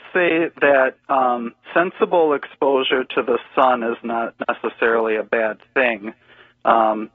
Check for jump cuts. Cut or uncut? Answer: cut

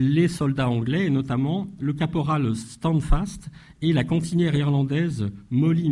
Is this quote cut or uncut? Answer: uncut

